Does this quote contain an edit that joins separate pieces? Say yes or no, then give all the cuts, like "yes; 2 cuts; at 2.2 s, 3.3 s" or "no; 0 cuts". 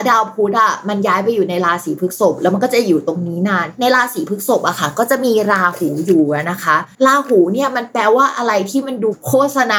yes; 1 cut; at 6.9 s